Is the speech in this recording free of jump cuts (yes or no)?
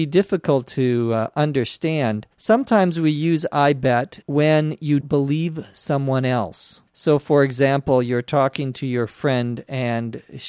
no